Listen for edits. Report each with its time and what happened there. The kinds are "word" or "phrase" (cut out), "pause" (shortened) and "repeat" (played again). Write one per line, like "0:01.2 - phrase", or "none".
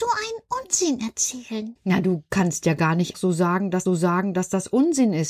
0:03.1 - word
0:03.9 - repeat